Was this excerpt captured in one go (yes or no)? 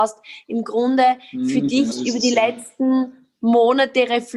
no